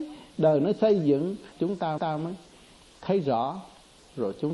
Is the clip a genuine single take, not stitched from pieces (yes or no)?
no